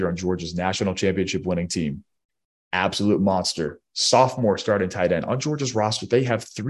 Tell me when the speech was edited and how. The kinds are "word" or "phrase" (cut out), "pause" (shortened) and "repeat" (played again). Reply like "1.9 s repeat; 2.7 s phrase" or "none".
none